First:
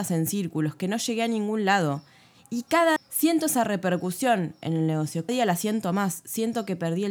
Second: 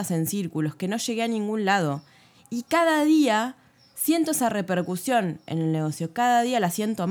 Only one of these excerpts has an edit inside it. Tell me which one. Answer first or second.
first